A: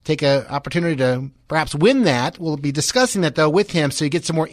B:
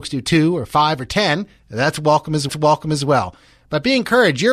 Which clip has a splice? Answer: B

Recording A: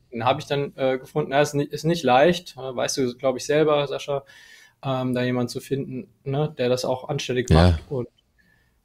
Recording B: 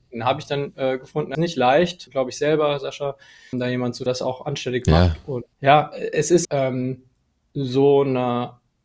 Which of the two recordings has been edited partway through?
B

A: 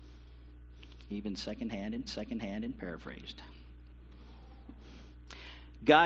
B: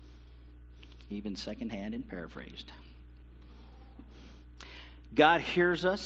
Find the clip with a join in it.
A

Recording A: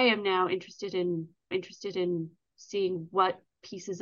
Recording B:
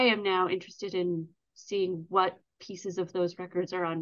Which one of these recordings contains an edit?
A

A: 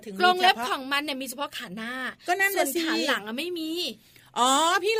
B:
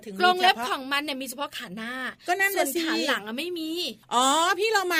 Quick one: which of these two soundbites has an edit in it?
B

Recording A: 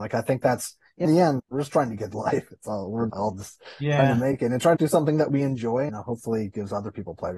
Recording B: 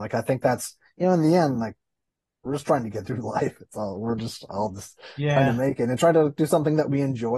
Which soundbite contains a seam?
A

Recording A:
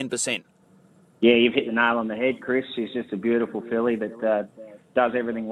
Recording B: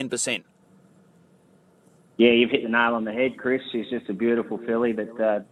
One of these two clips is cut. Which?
A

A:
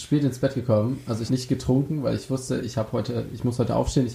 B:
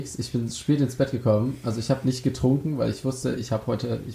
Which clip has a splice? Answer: A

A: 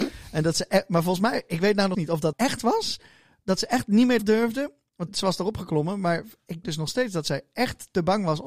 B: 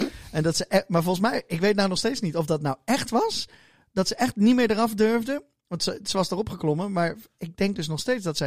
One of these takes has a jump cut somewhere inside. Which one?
A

